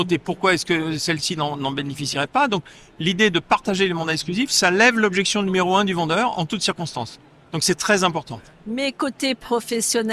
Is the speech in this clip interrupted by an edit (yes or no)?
no